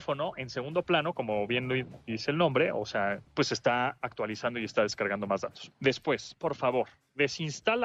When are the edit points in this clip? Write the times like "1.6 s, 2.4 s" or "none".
none